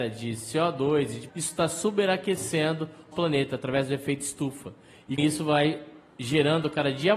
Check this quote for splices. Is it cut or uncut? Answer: cut